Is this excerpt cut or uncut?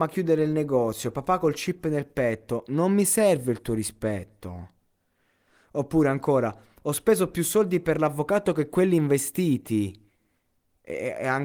uncut